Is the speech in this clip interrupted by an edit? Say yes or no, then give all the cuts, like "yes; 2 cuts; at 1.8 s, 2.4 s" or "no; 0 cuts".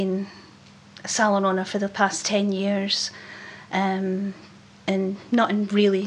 no; 0 cuts